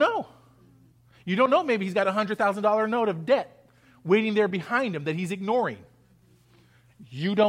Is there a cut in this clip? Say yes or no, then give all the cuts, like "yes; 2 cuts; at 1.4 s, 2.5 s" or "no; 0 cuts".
no; 0 cuts